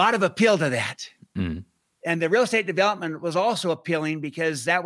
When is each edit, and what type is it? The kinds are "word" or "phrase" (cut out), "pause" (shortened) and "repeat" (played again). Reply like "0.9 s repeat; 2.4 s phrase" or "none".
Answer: none

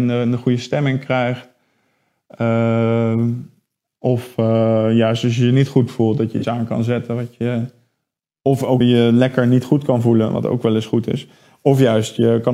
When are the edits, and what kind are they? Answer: 8.8 s word

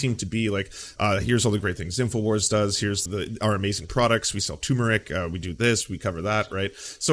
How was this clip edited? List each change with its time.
3.1 s word

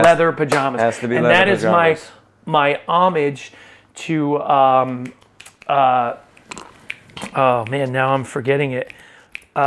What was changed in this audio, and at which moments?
none

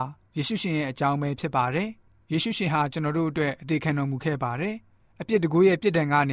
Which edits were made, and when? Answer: none

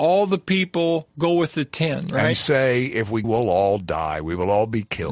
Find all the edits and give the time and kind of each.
2.3 s word; 3.2 s phrase

